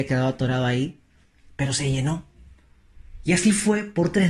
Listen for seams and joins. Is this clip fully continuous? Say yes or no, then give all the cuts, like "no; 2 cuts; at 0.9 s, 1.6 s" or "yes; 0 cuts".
yes; 0 cuts